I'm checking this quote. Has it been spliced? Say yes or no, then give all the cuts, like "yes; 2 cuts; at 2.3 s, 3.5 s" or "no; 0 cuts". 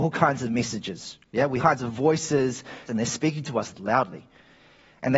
yes; 2 cuts; at 1.6 s, 2.9 s